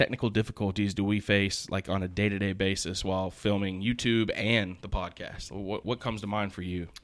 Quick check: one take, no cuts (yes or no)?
no